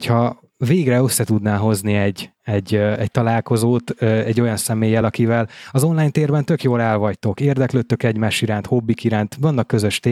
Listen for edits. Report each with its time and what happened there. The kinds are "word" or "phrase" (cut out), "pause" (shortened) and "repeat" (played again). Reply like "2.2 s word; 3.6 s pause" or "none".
none